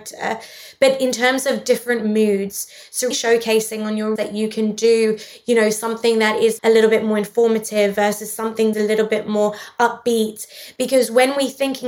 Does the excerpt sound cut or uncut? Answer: cut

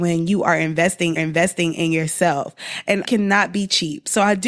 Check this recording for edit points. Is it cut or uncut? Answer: cut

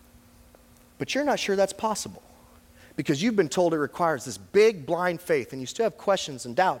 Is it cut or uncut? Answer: uncut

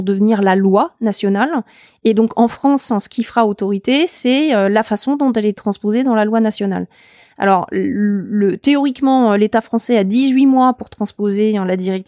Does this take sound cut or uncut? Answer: uncut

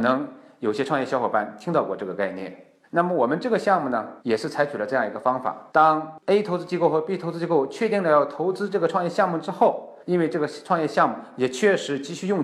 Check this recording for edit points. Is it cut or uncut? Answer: cut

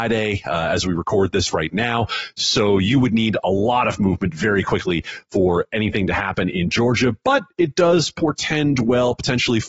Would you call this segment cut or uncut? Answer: uncut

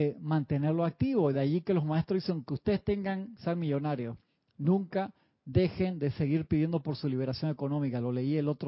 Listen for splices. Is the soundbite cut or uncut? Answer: uncut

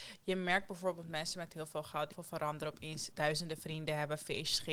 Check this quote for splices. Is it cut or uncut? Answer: cut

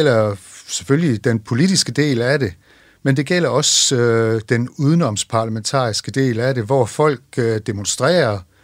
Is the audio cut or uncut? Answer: uncut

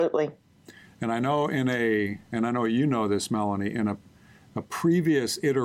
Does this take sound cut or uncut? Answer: uncut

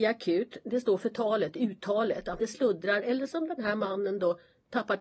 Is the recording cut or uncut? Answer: cut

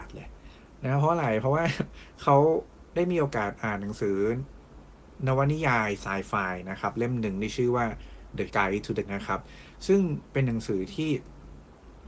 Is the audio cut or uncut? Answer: cut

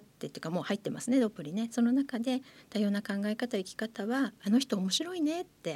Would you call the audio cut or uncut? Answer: uncut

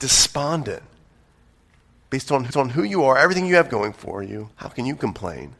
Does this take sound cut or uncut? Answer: cut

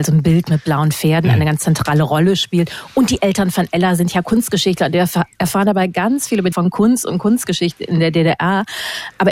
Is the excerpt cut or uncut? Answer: cut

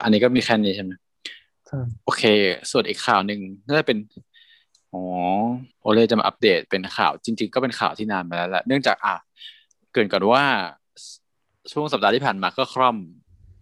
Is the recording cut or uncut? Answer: cut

